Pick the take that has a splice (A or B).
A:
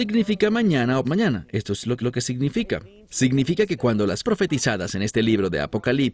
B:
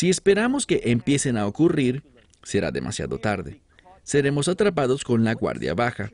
A